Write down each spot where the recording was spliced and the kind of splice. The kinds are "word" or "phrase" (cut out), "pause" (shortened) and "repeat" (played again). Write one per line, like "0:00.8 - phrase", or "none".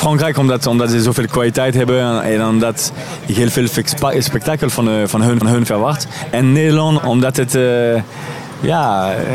0:05.4 - repeat
0:07.0 - word